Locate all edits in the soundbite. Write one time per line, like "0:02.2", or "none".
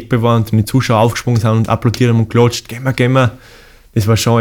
none